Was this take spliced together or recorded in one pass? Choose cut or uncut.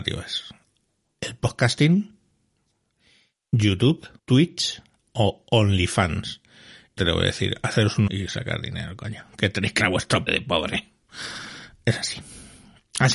cut